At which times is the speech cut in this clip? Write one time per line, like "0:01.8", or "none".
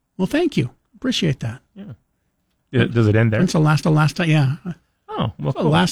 0:03.8